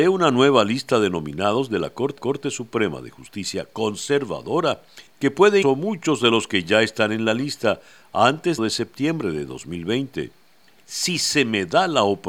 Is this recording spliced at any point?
yes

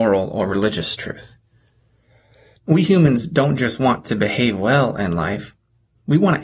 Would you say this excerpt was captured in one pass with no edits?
yes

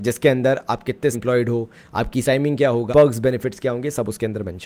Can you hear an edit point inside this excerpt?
yes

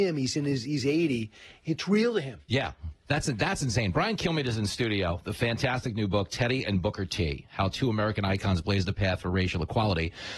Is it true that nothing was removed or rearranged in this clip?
no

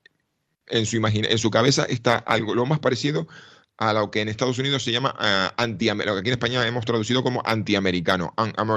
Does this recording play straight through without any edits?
yes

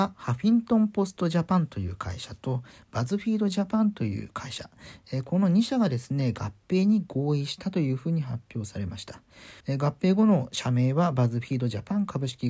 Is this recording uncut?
no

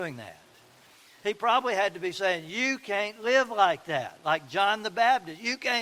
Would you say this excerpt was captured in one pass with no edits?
yes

